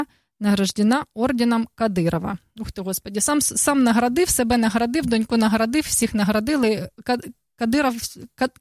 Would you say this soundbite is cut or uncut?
uncut